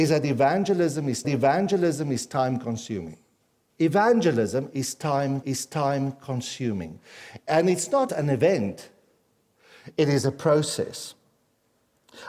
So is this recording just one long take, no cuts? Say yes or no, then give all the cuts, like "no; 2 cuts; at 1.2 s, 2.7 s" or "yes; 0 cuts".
no; 3 cuts; at 1.2 s, 5.4 s, 8.1 s